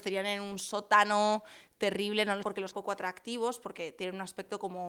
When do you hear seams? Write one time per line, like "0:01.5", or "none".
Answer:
0:02.4
0:02.7

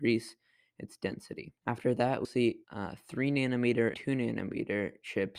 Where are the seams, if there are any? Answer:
0:01.6
0:02.2
0:02.6
0:03.9

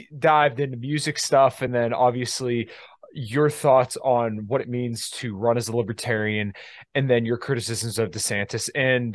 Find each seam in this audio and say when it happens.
none

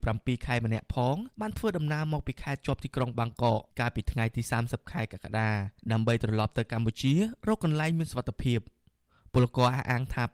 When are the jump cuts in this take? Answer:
0:01.3
0:05.8

